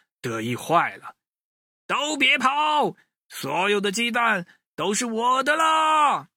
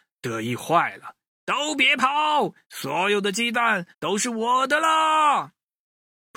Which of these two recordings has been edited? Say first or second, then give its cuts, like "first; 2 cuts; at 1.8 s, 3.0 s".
second; 3 cuts; at 1.3 s, 2.6 s, 3.9 s